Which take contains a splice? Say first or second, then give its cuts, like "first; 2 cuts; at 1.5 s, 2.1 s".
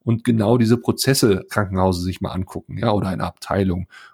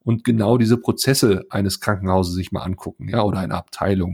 first; 1 cut; at 1.5 s